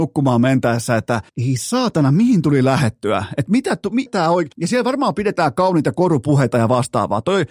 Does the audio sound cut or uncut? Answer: cut